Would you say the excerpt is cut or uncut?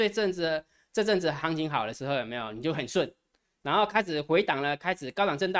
uncut